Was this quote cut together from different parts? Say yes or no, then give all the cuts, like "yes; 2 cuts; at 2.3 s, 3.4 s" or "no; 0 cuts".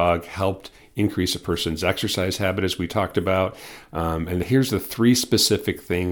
no; 0 cuts